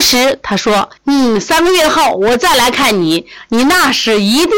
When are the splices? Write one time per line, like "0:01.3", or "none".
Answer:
0:01.0